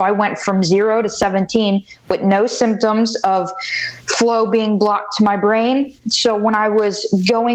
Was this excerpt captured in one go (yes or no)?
yes